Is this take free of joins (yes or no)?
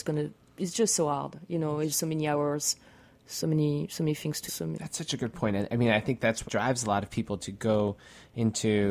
no